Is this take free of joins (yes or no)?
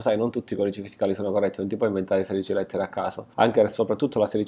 no